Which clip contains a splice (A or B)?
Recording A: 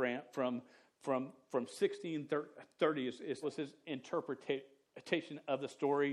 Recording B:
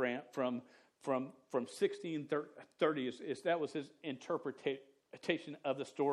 A